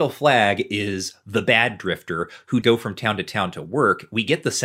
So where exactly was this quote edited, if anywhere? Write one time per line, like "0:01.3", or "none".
0:02.6